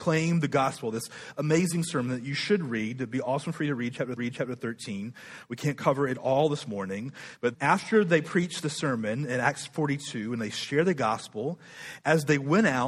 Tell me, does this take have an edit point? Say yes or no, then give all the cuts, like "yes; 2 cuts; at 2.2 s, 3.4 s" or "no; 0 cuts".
yes; 2 cuts; at 4.2 s, 7.5 s